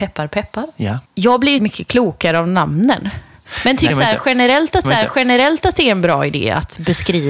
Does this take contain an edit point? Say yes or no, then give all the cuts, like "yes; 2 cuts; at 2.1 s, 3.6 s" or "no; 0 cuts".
yes; 4 cuts; at 1.0 s, 1.6 s, 3.9 s, 4.8 s